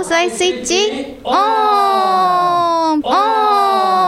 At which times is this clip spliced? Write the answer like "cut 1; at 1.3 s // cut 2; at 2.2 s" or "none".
cut 1; at 3.0 s